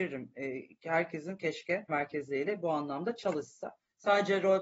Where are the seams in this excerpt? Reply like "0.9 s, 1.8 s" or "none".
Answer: 1.9 s